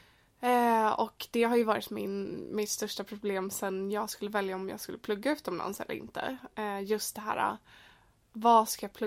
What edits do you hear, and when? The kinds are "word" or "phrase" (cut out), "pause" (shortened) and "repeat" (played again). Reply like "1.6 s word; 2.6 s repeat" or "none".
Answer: none